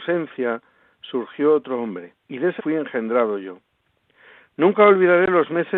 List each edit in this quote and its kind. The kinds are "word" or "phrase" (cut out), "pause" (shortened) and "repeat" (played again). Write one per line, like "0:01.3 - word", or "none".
0:02.2 - pause
0:02.6 - word